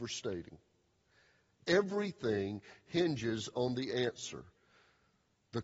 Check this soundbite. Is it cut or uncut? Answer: uncut